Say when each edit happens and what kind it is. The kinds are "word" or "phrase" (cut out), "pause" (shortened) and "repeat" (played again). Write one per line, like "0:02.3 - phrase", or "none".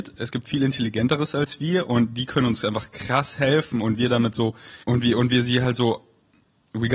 0:04.8 - pause